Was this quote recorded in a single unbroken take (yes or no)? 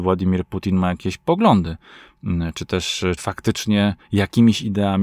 no